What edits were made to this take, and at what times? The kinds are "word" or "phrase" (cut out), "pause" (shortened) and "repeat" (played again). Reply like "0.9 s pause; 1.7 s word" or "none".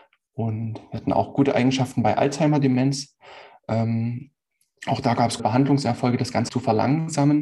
5.4 s word; 6.5 s word